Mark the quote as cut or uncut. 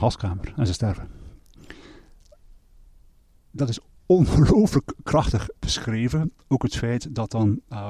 cut